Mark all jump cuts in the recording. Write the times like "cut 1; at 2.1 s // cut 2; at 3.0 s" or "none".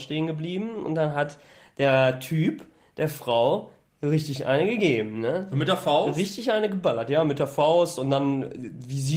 none